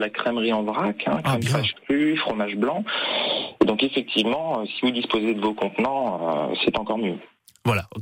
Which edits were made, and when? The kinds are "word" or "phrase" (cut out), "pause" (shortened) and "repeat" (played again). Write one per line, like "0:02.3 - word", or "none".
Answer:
none